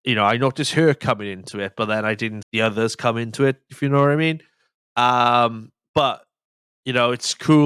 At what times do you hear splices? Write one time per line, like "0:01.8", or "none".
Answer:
0:02.4